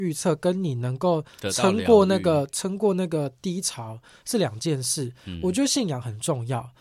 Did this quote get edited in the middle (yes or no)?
no